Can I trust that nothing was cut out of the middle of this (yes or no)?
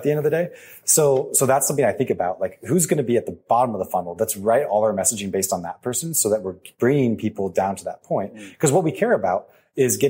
yes